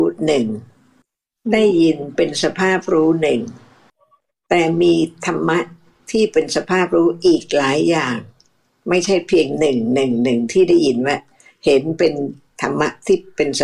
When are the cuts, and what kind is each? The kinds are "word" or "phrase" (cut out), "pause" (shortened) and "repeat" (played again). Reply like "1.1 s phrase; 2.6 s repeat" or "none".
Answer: none